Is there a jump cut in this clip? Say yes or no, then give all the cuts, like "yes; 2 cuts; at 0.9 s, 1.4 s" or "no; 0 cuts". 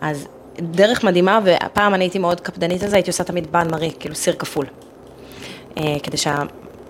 no; 0 cuts